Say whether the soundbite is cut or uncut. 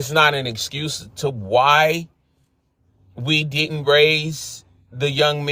uncut